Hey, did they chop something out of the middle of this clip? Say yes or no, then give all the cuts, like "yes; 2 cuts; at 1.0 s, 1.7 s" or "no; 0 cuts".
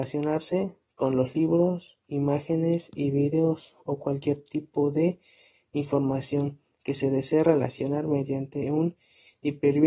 no; 0 cuts